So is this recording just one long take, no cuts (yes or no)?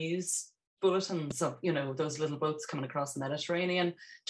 yes